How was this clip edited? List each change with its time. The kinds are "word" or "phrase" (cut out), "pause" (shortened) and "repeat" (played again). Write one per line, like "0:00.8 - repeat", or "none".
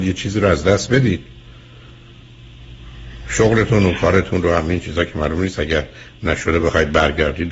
none

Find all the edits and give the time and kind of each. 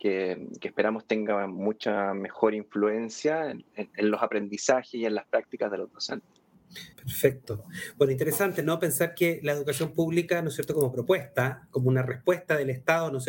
0:06.9 - pause

